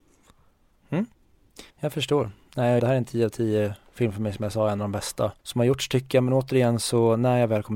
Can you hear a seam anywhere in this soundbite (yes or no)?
yes